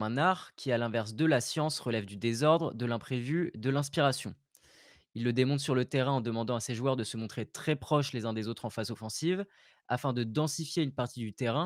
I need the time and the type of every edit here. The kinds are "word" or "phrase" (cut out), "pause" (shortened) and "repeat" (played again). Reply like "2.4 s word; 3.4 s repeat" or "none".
none